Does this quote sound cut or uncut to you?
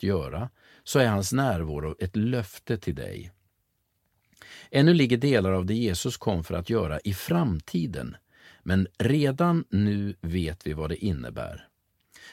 uncut